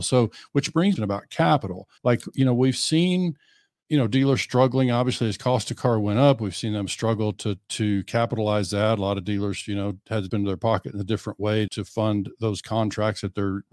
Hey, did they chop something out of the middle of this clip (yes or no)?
yes